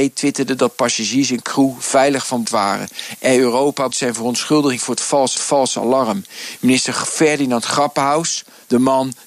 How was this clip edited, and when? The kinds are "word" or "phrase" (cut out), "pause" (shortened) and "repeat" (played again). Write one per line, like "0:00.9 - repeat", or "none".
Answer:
0:02.4 - word
0:03.9 - word
0:04.8 - word
0:05.4 - repeat